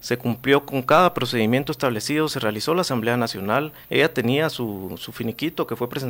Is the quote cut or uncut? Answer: cut